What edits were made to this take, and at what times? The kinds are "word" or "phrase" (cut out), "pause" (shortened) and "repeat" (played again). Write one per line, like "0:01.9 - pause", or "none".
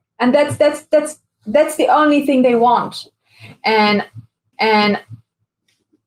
0:04.5 - repeat